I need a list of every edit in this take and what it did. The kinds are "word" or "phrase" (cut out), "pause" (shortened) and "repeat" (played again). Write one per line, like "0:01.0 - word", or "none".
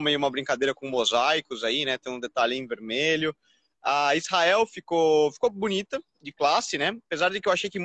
none

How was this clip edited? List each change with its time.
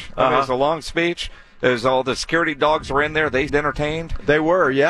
0:03.5 - word

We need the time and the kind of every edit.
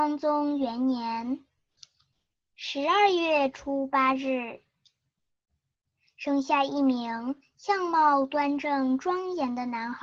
none

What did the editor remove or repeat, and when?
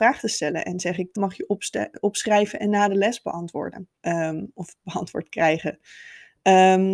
0:01.1 - phrase
0:04.0 - pause

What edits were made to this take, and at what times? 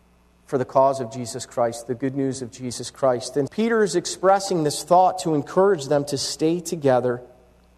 0:03.5 - word

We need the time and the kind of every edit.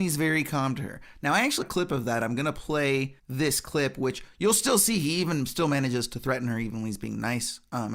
0:01.6 - word
0:03.2 - pause

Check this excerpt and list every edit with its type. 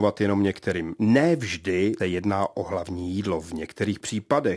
0:02.0 - word

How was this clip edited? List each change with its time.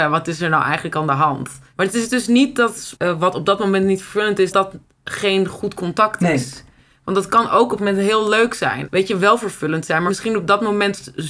0:03.0 - phrase
0:04.5 - word
0:07.8 - word

